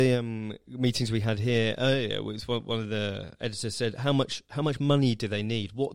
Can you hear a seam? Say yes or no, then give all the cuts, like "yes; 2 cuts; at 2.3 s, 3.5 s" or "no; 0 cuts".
no; 0 cuts